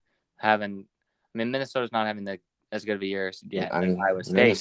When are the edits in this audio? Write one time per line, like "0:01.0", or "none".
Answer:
none